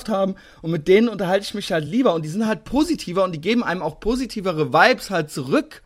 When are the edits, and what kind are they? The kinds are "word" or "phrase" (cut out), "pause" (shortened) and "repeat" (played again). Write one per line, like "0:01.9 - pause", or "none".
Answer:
none